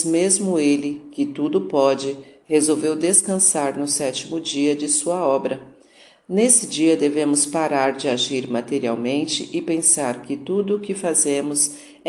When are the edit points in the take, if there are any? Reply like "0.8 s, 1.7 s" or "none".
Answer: none